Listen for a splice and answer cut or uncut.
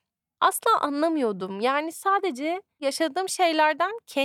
uncut